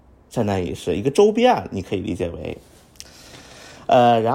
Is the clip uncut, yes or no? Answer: yes